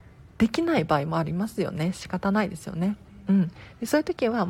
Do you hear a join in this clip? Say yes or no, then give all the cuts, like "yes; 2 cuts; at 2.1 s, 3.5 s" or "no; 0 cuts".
no; 0 cuts